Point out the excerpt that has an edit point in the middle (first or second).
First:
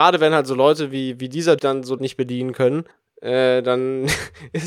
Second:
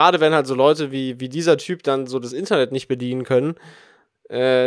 first